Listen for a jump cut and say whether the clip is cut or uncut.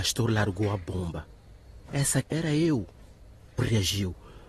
cut